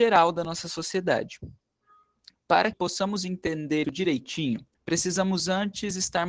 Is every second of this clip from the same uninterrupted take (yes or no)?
no